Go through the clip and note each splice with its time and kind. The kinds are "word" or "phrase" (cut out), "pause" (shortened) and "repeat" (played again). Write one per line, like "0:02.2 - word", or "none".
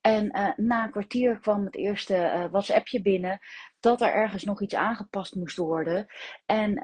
none